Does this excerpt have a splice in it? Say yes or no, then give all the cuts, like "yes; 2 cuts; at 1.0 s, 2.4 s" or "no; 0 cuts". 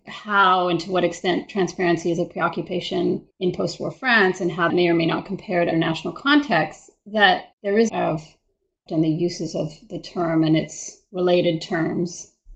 yes; 6 cuts; at 3.3 s, 4.7 s, 5.7 s, 7.5 s, 7.9 s, 8.9 s